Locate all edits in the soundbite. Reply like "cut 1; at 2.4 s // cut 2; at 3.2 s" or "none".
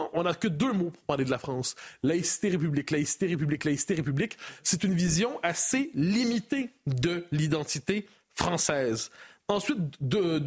none